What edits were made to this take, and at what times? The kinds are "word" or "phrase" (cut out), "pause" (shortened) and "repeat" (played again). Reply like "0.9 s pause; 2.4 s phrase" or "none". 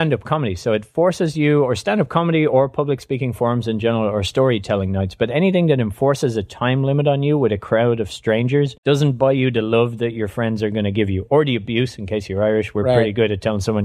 8.8 s pause